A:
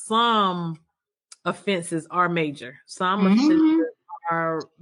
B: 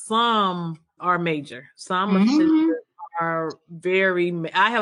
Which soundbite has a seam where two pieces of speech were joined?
B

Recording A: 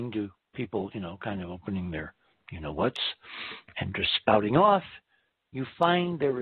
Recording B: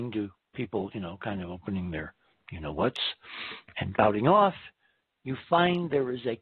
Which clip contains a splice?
B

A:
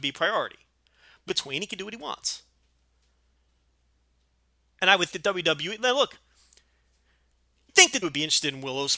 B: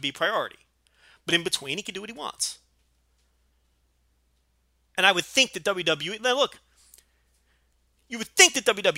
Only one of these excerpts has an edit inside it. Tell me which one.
A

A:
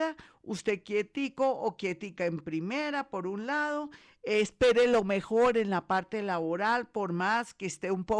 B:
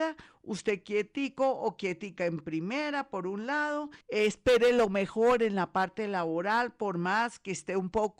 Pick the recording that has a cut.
B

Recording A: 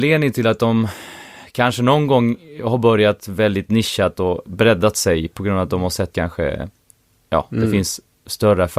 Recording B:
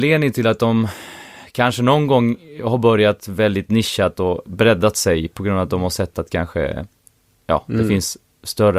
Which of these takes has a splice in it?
A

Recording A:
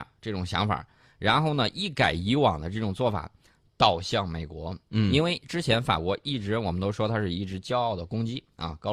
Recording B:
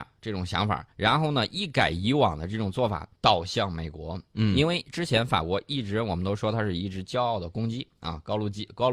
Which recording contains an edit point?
B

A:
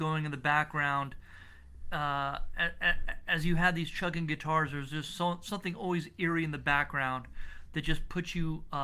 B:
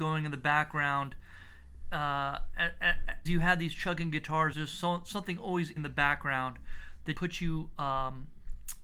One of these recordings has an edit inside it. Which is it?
B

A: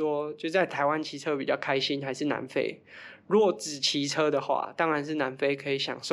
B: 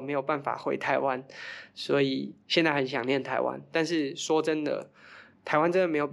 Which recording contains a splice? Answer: B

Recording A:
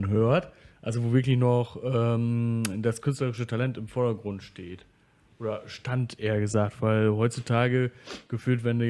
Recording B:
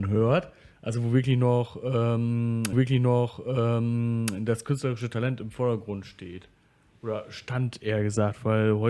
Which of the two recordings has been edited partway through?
B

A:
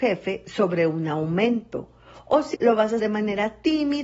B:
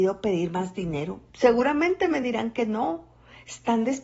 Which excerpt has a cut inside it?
A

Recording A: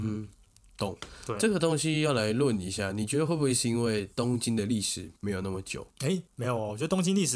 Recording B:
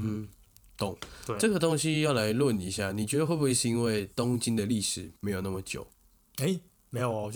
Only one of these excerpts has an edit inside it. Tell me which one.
A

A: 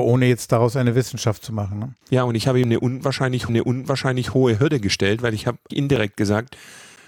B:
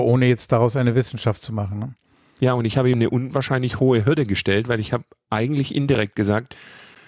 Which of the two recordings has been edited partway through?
A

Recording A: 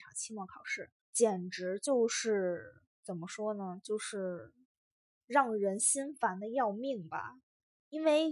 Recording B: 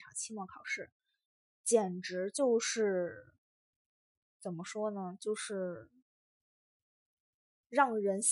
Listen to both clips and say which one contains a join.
A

